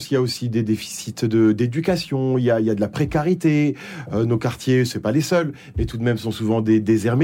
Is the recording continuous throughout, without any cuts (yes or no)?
yes